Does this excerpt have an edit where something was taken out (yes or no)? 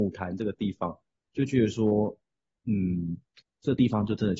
no